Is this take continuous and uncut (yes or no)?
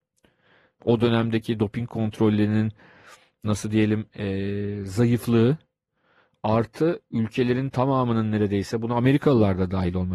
yes